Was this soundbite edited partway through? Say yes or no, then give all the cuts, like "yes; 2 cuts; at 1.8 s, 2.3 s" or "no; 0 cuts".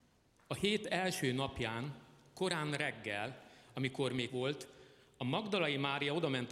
yes; 1 cut; at 4.3 s